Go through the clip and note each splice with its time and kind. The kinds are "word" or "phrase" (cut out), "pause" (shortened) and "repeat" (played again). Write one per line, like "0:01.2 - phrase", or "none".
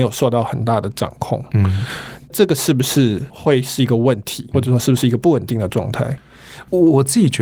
0:04.5 - word